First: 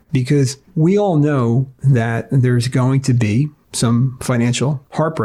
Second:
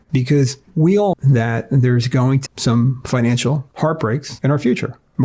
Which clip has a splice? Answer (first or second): second